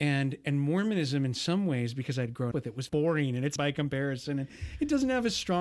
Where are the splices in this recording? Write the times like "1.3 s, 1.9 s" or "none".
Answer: 2.5 s, 2.9 s, 3.6 s